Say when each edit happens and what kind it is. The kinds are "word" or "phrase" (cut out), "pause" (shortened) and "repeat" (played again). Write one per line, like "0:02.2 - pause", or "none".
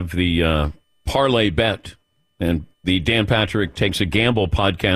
none

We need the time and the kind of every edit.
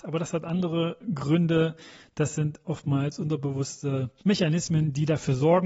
0:04.2 - pause

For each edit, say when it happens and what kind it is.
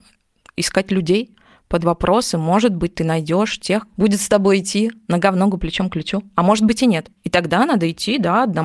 0:01.8 - word
0:03.9 - word

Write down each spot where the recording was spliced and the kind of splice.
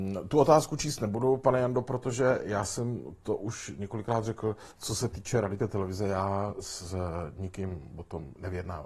0:04.7 - pause
0:05.6 - word

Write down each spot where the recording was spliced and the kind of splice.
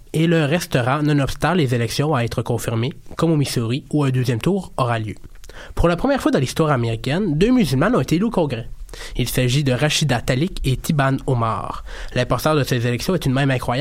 none

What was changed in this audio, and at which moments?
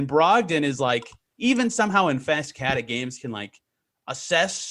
none

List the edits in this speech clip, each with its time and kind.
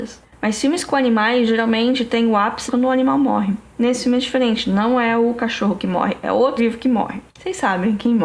0:02.7 - word
0:06.6 - word
0:07.3 - pause

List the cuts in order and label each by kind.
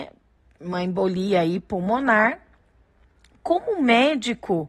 none

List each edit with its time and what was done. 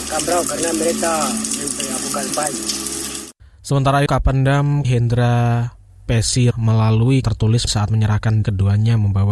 0:02.3 - word
0:04.1 - word
0:04.8 - word
0:06.5 - word
0:07.2 - word
0:07.7 - word
0:08.4 - word

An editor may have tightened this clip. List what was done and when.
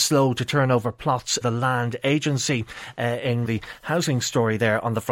0:01.4 - word
0:03.4 - phrase

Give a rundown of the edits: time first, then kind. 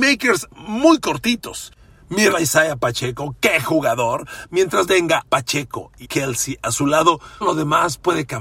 0:02.3 - word
0:04.9 - word
0:05.3 - word
0:06.0 - word
0:07.4 - word

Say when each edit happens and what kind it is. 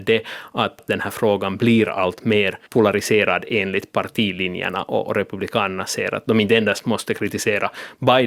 0:02.7 - pause

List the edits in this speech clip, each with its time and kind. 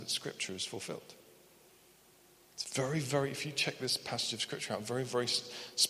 0:01.7 - pause

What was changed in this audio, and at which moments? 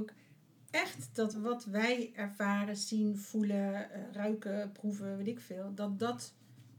none

